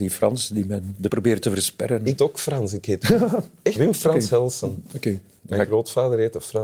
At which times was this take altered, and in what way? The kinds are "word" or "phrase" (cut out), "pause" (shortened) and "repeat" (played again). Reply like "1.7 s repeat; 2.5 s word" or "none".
1.1 s word; 2.2 s word; 3.8 s word